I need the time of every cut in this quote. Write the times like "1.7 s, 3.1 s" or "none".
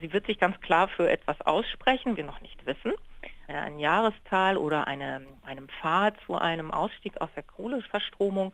2.1 s, 3.5 s

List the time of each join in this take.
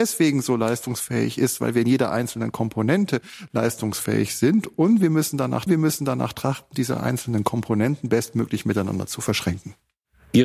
5.7 s

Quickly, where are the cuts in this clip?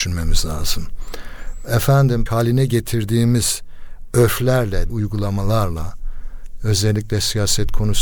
2.3 s, 4.9 s

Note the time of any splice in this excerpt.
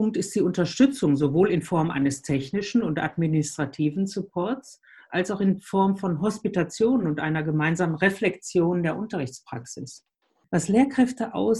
none

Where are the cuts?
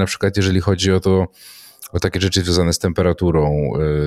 none

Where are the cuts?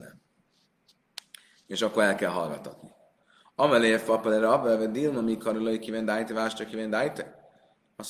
none

